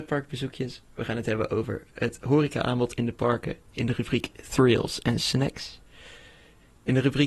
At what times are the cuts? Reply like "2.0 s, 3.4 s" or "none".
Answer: none